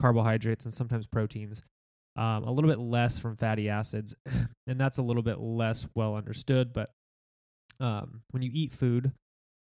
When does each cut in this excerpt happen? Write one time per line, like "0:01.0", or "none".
none